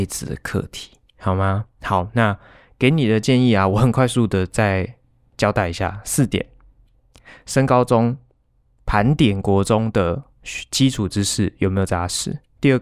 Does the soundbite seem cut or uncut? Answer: uncut